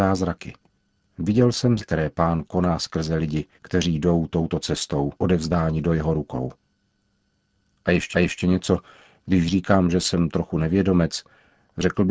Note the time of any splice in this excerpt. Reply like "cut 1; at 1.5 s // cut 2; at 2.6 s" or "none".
cut 1; at 1.8 s // cut 2; at 3.6 s // cut 3; at 5.2 s // cut 4; at 8.1 s